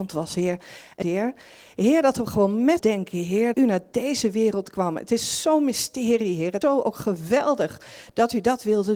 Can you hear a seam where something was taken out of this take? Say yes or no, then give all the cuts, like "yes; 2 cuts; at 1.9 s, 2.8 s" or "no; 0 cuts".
yes; 4 cuts; at 1.0 s, 2.8 s, 3.5 s, 6.6 s